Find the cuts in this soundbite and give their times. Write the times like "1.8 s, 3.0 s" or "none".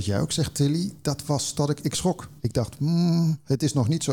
1.5 s, 2.4 s